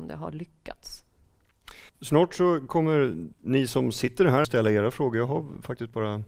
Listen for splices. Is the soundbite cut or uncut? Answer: cut